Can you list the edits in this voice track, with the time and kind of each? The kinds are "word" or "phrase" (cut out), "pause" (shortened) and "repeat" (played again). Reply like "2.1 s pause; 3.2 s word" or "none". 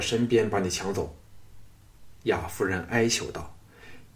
1.5 s pause